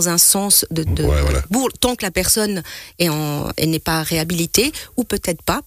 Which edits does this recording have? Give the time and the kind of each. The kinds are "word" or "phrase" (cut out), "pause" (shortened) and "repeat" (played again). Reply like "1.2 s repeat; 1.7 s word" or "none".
none